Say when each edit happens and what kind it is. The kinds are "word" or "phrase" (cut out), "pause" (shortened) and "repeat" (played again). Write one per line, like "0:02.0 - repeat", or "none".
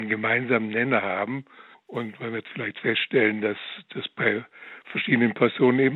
0:01.7 - pause